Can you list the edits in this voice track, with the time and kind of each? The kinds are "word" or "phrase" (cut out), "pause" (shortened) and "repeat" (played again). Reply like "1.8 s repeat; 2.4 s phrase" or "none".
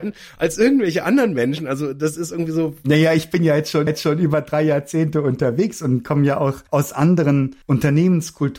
3.9 s repeat; 6.7 s pause; 7.6 s pause